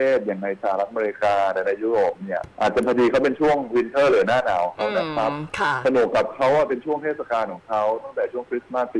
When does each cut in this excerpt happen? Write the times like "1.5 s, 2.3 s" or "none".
2.5 s